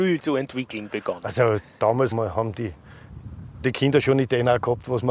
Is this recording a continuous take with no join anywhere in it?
no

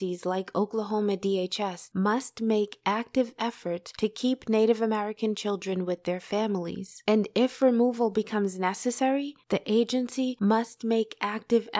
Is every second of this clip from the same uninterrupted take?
yes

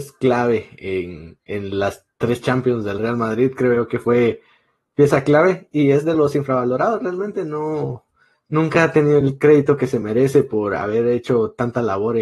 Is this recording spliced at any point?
no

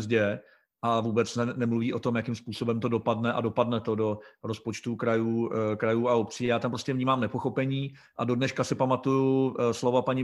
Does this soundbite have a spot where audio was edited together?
no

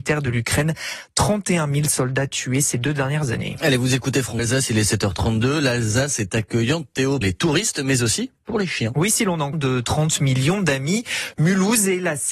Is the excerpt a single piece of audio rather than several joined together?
no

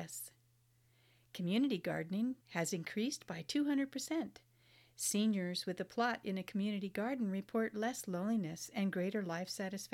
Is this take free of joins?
no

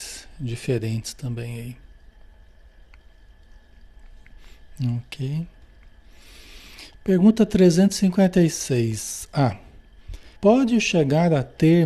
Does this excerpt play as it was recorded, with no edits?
no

